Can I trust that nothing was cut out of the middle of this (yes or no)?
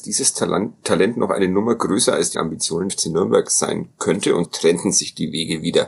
no